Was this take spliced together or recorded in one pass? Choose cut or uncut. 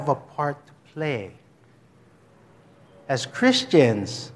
uncut